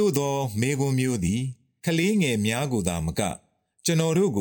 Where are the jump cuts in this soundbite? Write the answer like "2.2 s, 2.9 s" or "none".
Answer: none